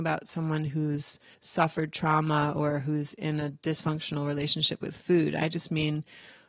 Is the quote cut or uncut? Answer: cut